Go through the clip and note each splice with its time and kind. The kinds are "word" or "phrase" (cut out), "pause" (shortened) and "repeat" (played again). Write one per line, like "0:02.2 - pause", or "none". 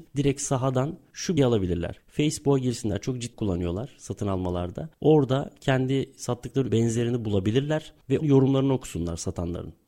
0:01.4 - word
0:03.3 - word
0:06.7 - word
0:08.2 - word